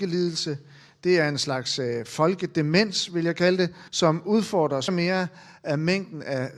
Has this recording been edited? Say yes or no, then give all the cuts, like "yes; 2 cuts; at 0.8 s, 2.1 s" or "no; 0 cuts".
yes; 2 cuts; at 3.9 s, 4.9 s